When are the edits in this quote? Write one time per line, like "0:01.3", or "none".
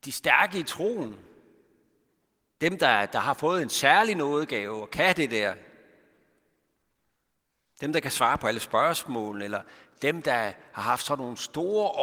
none